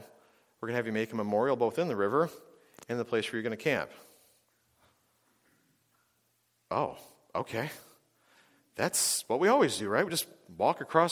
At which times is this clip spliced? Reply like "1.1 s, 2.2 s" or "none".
none